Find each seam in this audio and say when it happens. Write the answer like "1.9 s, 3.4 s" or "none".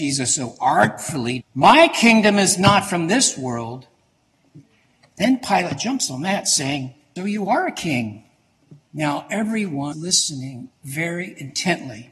1.4 s, 7.2 s, 8.8 s, 9.9 s